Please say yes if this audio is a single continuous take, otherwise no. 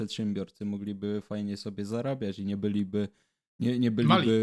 yes